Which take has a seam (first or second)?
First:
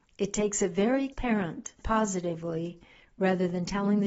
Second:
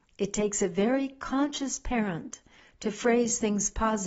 first